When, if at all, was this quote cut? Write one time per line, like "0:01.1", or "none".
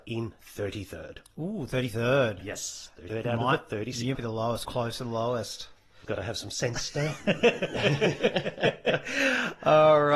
0:03.1
0:04.1
0:04.6
0:06.0